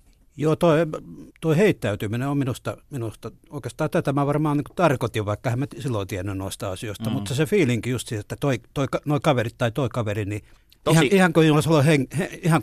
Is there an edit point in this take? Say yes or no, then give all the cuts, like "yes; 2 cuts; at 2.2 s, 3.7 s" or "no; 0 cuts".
yes; 2 cuts; at 1.3 s, 10.6 s